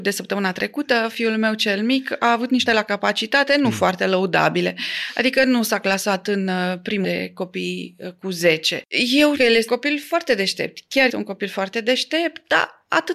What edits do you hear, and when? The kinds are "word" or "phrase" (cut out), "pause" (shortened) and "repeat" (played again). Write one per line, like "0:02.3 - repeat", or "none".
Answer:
0:02.7 - word
0:07.0 - word
0:09.3 - word
0:09.7 - word
0:11.1 - word